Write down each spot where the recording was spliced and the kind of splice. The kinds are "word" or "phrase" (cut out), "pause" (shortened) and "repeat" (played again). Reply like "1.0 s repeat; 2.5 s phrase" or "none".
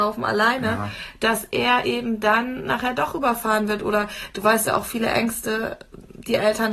none